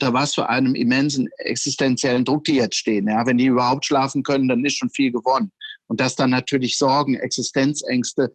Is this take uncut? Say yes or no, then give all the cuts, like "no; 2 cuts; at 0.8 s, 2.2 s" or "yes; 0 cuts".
yes; 0 cuts